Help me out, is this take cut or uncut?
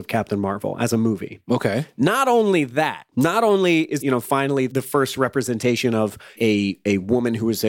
cut